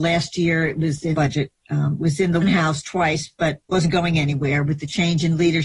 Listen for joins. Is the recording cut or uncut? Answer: cut